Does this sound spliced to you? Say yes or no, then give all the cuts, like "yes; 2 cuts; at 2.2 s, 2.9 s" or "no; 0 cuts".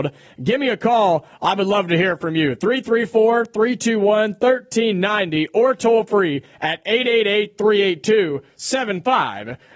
no; 0 cuts